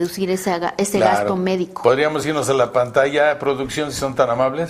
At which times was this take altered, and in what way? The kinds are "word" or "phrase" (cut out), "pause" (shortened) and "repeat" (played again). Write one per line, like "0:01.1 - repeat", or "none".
none